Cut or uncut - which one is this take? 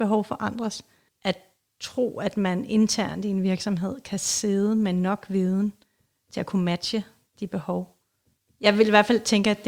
uncut